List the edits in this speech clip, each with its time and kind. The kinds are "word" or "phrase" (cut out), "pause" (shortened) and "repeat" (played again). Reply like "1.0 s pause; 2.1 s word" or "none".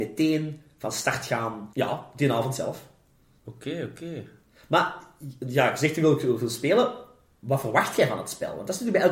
none